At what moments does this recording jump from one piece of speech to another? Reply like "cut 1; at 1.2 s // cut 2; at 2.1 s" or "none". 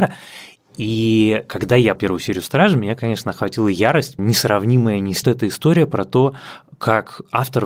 cut 1; at 2.0 s // cut 2; at 4.2 s // cut 3; at 5.2 s